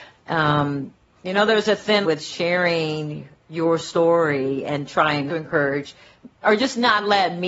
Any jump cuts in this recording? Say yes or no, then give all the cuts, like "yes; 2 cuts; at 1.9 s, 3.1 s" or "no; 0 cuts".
yes; 3 cuts; at 2.0 s, 5.3 s, 6.4 s